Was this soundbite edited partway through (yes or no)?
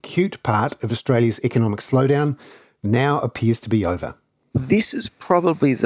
no